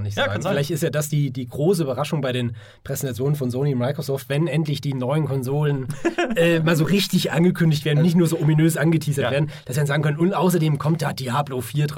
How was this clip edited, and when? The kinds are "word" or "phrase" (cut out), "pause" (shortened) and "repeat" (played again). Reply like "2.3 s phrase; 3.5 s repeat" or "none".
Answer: none